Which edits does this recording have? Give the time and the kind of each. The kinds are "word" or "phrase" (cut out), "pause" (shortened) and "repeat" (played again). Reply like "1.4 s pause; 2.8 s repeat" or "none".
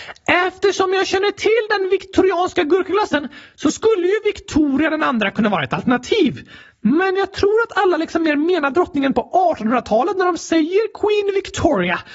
none